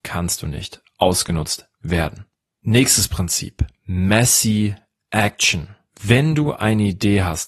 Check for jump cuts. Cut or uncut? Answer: uncut